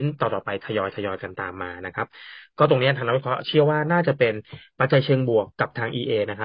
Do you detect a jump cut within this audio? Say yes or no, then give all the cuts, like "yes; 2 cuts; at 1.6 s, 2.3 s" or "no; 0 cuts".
yes; 1 cut; at 5.5 s